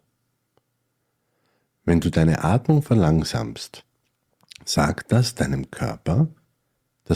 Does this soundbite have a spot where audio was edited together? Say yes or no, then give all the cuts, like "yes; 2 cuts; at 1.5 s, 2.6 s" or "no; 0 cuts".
no; 0 cuts